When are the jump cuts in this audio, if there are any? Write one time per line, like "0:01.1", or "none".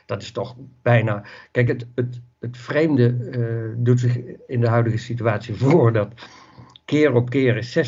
none